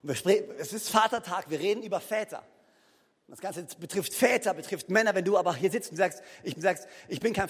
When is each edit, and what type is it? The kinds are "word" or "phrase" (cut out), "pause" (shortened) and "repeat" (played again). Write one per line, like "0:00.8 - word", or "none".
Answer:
0:06.5 - repeat